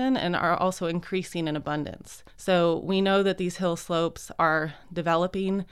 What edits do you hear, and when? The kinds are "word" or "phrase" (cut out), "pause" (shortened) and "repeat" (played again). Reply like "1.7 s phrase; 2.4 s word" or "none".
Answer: 2.3 s pause